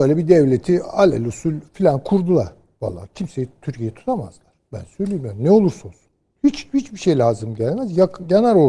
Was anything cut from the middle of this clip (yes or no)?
no